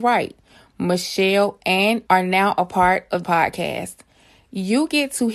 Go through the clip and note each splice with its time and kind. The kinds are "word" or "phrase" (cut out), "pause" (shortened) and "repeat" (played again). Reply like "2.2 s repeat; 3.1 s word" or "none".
2.1 s word; 3.2 s word